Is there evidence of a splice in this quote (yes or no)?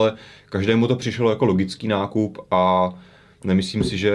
no